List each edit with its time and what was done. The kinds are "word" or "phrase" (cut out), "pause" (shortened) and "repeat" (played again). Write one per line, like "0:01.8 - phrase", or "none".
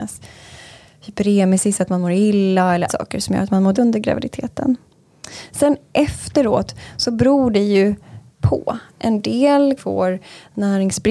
0:02.9 - word
0:03.7 - word
0:09.8 - word

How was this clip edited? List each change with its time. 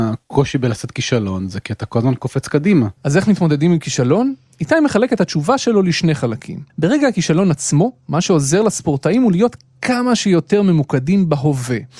0:03.0 - pause
0:06.7 - pause

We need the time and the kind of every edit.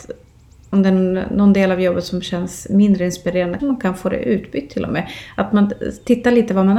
0:03.6 - word

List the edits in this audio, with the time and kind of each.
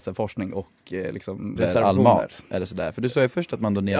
0:01.6 - phrase

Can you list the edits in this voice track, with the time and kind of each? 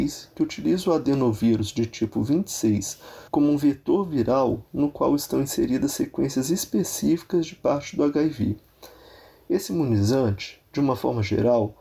0:03.3 - pause

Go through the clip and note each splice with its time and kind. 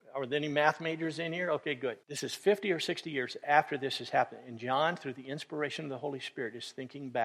0:02.0 - pause

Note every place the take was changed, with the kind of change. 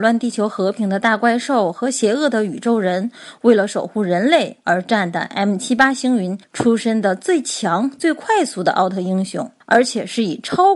0:06.4 - pause
0:09.6 - pause

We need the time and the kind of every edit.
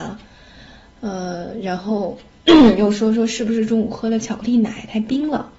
none

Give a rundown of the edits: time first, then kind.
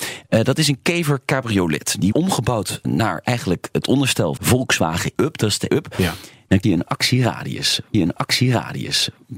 0:02.1 - word
0:02.8 - word
0:04.4 - phrase
0:05.2 - word
0:05.7 - word
0:06.6 - word
0:07.9 - repeat

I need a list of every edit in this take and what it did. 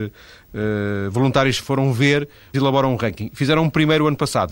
0:01.6 - word
0:02.5 - word

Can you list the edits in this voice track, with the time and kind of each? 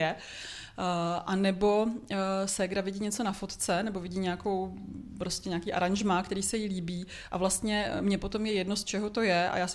none

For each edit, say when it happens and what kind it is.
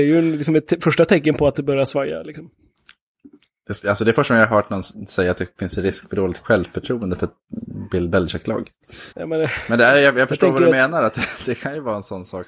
0:09.1 - pause

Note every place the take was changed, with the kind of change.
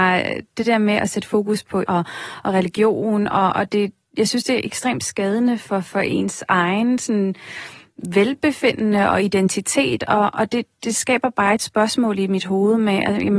0:01.9 - word

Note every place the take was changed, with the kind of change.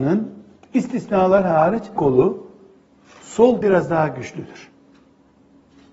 0:02.0 - word
0:03.6 - word

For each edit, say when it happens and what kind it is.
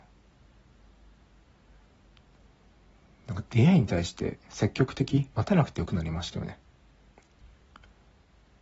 0:05.3 - pause

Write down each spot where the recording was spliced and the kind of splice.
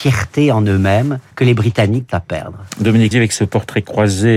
0:01.3 - pause
0:02.1 - word
0:03.1 - word

